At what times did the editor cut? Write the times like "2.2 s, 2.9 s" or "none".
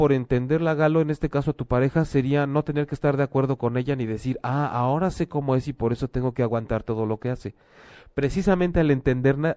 none